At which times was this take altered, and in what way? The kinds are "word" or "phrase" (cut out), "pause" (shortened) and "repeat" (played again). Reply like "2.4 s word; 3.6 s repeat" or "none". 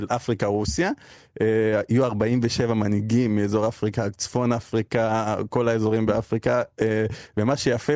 none